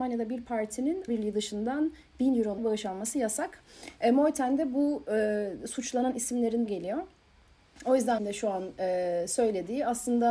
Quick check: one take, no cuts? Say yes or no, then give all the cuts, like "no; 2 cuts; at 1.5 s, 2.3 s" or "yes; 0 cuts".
no; 4 cuts; at 1.1 s, 2.6 s, 6.7 s, 8.2 s